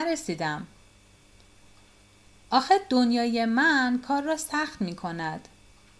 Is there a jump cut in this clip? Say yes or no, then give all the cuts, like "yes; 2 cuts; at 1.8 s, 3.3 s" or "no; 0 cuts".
no; 0 cuts